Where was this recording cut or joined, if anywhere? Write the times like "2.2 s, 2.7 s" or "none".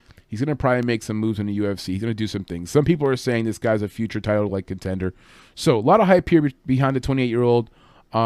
none